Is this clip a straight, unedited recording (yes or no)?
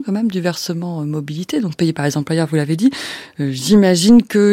yes